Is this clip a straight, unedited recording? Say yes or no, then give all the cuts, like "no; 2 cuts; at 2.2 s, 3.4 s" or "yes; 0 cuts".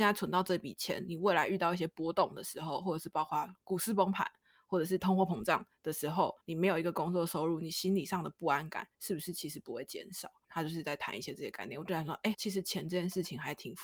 no; 3 cuts; at 6.4 s, 8.9 s, 12.3 s